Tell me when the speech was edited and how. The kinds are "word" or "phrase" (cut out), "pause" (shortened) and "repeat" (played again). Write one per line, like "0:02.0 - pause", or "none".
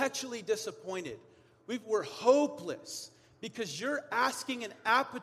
none